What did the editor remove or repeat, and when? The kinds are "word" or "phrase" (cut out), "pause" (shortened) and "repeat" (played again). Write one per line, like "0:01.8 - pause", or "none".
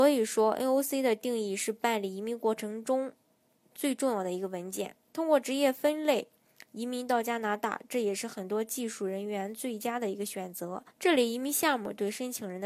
0:10.9 - pause